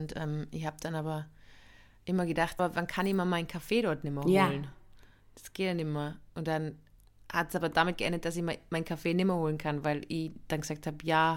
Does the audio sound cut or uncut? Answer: cut